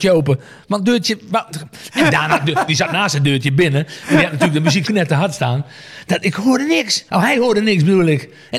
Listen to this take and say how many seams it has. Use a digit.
3